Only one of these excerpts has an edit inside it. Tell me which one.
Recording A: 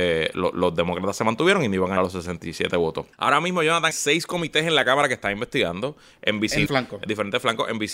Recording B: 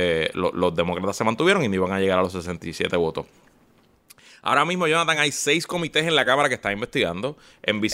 A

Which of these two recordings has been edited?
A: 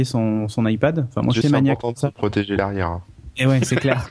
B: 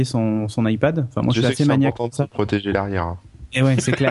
A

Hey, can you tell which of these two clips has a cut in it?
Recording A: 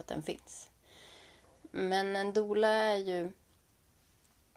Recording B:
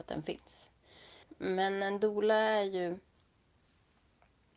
B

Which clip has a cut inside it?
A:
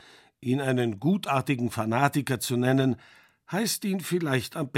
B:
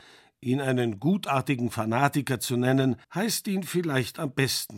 B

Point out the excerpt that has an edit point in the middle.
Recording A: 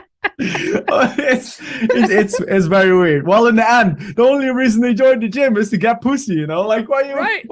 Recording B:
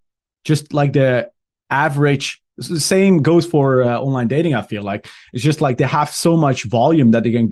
A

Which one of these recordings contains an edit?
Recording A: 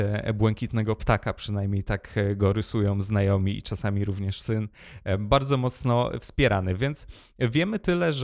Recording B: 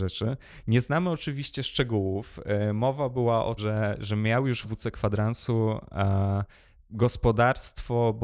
B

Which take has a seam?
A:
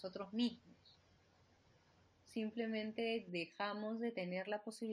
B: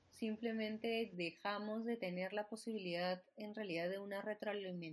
A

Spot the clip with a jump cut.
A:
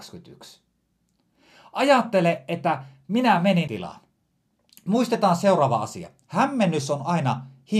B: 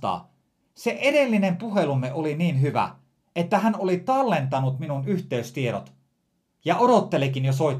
A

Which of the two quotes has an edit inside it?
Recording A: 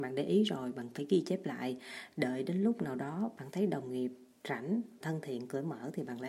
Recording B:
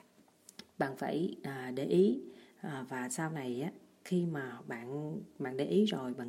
A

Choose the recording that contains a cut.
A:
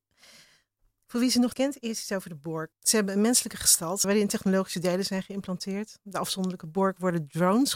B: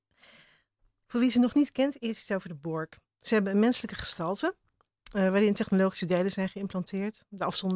A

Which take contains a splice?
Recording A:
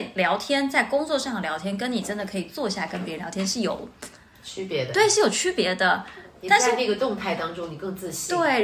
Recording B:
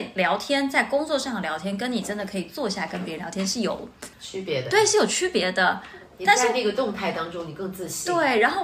B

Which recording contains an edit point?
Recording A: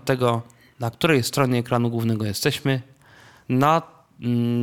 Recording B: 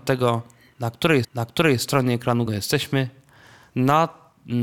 B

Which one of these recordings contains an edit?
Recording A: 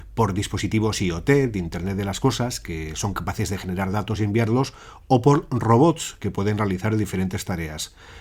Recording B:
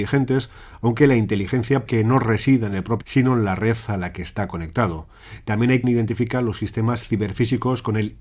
B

